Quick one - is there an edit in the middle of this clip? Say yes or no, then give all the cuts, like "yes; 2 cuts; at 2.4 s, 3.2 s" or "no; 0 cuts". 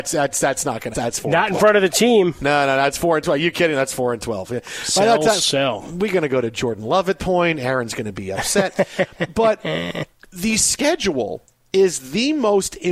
yes; 3 cuts; at 0.9 s, 5.4 s, 7.2 s